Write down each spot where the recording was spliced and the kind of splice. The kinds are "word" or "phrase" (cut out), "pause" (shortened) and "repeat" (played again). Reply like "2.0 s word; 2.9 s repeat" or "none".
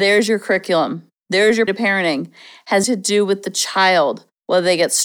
1.7 s word; 2.8 s word